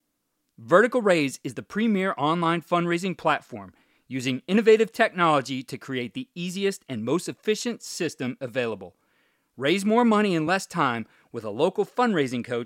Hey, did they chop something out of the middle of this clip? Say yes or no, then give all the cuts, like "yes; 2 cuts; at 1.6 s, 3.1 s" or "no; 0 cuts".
no; 0 cuts